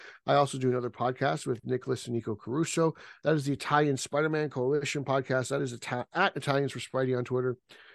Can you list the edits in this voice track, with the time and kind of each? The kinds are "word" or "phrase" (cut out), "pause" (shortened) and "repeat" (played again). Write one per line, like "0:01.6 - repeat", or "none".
none